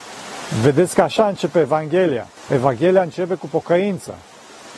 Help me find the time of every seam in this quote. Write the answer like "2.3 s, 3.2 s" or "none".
2.4 s